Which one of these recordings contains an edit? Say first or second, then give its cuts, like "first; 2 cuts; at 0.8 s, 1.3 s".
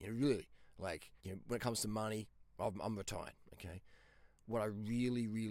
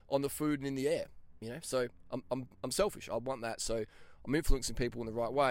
first; 1 cut; at 1.2 s